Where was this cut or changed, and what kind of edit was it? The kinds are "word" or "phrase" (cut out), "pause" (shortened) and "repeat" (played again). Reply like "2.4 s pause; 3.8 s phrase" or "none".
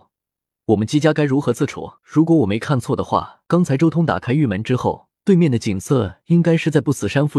2.0 s pause; 3.4 s pause; 5.2 s pause

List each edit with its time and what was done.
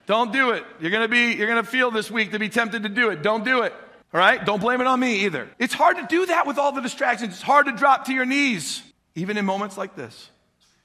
4.0 s pause; 5.5 s pause; 8.9 s pause

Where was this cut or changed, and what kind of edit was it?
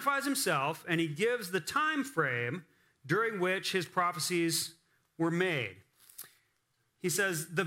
none

